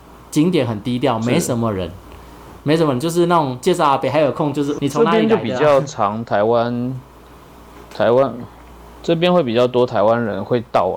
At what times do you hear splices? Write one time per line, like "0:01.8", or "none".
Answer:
0:04.8